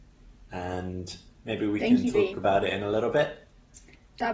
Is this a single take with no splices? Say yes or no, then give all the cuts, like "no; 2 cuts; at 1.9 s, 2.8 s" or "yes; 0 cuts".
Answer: yes; 0 cuts